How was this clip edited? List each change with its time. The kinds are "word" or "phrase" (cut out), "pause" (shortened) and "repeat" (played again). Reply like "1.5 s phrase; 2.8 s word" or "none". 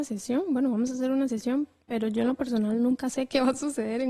none